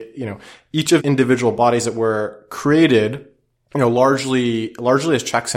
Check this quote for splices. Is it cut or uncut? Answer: cut